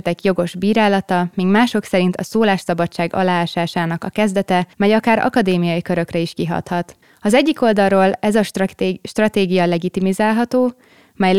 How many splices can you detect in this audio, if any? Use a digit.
3